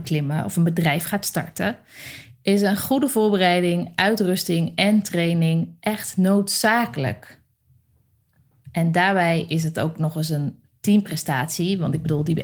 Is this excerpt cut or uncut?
uncut